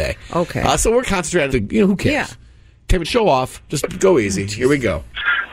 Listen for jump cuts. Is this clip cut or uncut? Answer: cut